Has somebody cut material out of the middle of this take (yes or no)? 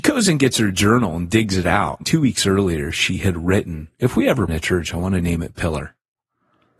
yes